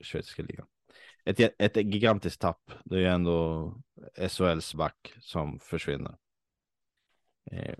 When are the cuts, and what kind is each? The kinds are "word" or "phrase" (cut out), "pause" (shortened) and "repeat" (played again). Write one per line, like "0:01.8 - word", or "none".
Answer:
0:04.7 - word